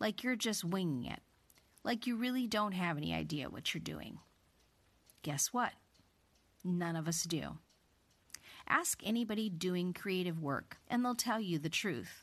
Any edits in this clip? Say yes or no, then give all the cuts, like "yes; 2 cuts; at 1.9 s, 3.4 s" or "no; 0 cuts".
yes; 2 cuts; at 9.9 s, 10.8 s